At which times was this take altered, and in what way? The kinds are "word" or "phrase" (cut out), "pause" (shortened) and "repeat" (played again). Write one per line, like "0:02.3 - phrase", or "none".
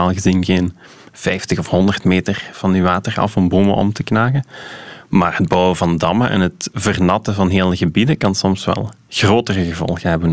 none